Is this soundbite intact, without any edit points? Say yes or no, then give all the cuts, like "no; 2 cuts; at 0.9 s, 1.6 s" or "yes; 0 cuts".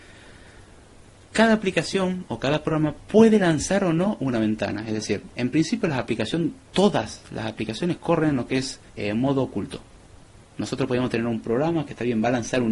no; 1 cut; at 8.9 s